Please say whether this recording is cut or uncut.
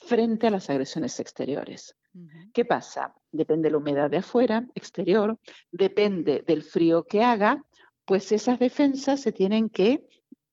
uncut